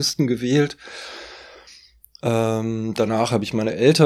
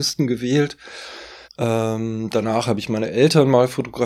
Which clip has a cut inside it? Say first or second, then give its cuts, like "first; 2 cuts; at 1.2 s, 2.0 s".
second; 1 cut; at 1.4 s